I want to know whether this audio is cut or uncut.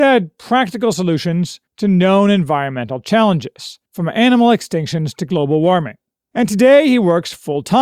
cut